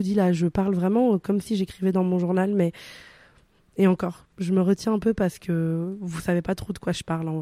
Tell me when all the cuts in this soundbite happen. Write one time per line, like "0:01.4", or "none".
none